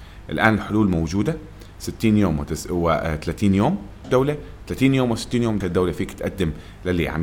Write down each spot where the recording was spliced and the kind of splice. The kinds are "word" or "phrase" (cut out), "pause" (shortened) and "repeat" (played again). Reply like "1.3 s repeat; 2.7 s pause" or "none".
4.0 s word; 5.6 s word